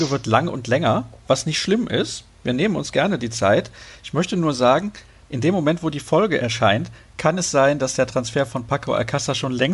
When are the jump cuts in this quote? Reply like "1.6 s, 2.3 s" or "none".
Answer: none